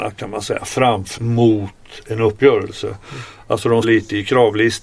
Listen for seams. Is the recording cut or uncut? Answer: cut